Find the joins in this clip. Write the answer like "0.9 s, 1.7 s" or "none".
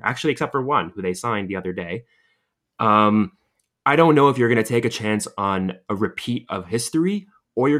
none